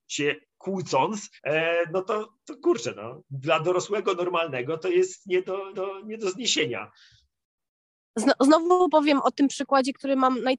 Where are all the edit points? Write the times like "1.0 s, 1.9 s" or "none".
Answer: 1.4 s, 2.4 s, 5.7 s